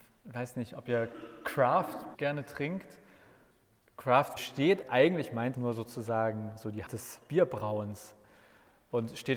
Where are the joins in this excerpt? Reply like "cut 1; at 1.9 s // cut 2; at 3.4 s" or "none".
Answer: cut 1; at 2.1 s // cut 2; at 4.4 s // cut 3; at 4.8 s // cut 4; at 5.5 s // cut 5; at 6.9 s